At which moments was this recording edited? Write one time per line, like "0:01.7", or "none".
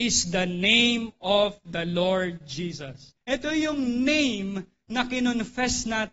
0:03.2